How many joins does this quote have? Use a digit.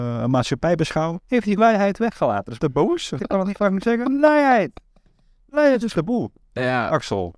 5